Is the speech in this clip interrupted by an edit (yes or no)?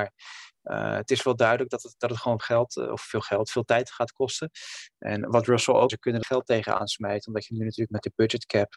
yes